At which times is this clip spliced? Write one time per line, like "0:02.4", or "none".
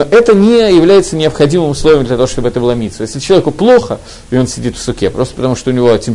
none

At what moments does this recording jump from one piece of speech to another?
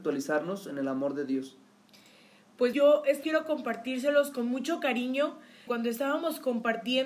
0:02.7
0:03.2
0:05.7

